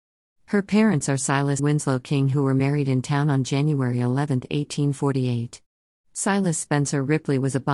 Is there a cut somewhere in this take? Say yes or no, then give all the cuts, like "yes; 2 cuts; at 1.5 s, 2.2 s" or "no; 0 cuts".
yes; 1 cut; at 1.6 s